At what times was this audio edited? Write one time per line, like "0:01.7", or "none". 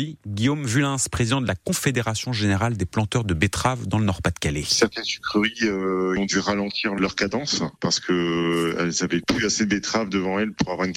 none